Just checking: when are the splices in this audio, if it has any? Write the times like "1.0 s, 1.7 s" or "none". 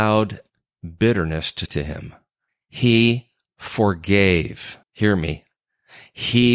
1.7 s, 2.5 s, 4.8 s